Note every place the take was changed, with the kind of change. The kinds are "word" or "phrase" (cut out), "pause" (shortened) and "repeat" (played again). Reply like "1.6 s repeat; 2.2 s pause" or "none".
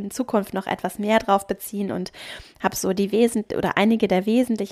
none